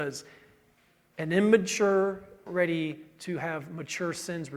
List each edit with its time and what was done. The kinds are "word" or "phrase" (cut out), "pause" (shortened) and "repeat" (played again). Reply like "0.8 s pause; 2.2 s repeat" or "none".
2.5 s phrase